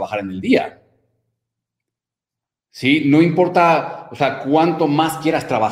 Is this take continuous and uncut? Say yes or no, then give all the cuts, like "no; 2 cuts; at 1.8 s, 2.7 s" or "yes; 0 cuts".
yes; 0 cuts